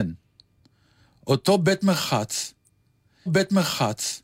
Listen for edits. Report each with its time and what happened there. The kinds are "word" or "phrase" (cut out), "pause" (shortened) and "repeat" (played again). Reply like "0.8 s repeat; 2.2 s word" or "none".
3.3 s repeat